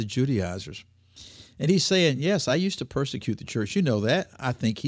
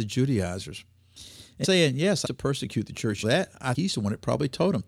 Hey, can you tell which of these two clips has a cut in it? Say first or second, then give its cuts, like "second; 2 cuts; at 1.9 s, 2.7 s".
second; 4 cuts; at 1.6 s, 2.2 s, 3.2 s, 3.7 s